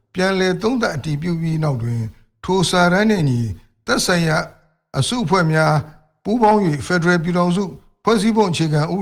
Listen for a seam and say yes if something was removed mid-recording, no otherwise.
no